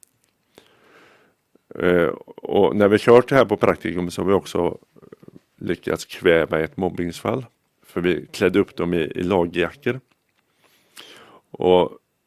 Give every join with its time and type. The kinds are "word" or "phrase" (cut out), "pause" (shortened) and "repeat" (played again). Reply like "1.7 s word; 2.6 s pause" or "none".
7.7 s pause